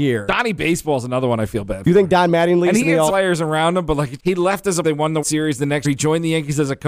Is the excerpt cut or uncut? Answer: cut